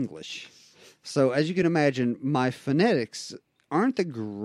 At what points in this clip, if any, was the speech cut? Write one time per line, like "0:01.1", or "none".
none